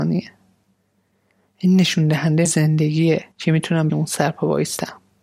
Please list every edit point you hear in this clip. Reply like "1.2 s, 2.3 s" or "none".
2.4 s, 3.3 s, 3.9 s